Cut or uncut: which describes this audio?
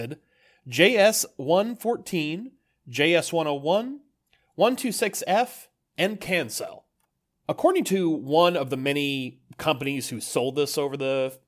uncut